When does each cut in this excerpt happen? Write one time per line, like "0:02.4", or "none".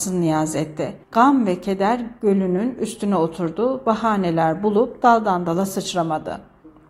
0:01.0

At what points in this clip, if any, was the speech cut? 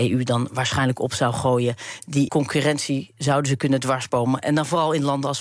0:02.3

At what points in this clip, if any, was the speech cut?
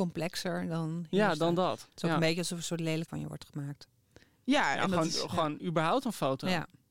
0:03.1

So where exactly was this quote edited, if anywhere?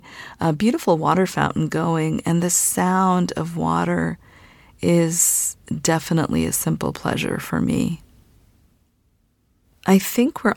none

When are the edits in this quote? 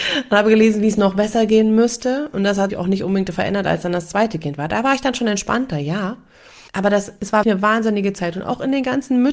0:02.7
0:06.7
0:07.4

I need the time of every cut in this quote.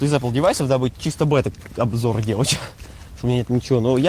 none

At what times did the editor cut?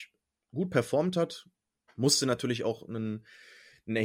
none

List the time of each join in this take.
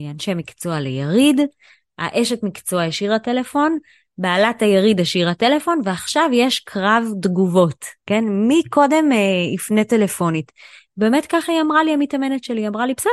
none

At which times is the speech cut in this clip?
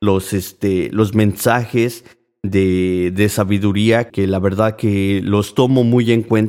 0:04.1

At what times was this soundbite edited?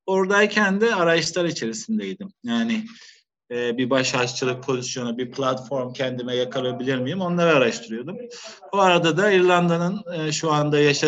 none

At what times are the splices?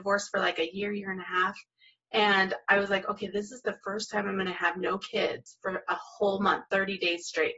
none

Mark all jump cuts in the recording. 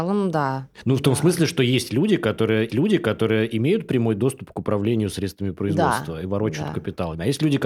0:02.7

